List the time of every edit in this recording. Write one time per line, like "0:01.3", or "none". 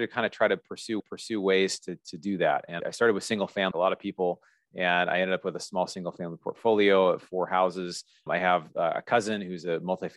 0:01.0
0:02.8
0:03.7
0:08.3